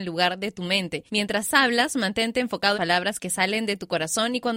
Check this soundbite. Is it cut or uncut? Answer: cut